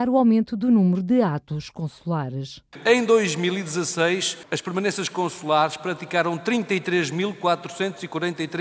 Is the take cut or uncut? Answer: uncut